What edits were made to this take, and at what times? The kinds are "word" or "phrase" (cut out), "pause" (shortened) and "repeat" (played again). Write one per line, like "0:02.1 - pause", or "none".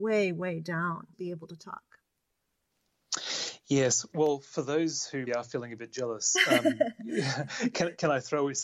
0:01.1 - word
0:05.3 - word